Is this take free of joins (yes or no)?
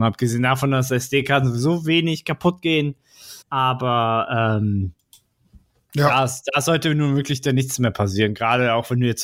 no